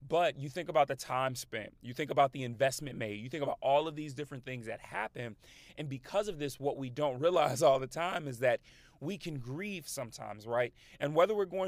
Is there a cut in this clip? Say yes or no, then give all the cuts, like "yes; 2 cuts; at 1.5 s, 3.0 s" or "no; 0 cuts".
no; 0 cuts